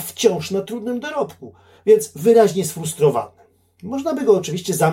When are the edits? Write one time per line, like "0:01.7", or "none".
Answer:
none